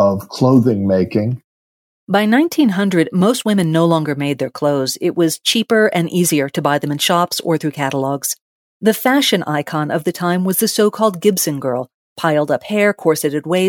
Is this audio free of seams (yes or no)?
yes